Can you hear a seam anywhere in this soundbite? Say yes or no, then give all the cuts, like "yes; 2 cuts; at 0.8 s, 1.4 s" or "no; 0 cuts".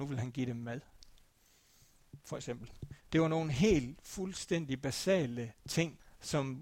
no; 0 cuts